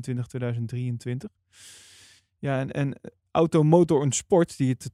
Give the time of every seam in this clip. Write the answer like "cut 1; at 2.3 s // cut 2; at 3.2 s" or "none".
none